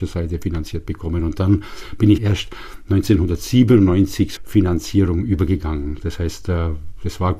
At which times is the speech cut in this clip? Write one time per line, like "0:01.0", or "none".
0:02.2
0:04.4